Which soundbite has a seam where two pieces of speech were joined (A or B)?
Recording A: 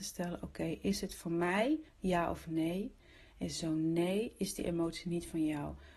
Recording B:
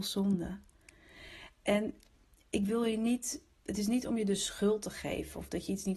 A